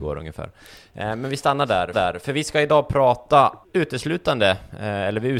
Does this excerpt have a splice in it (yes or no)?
yes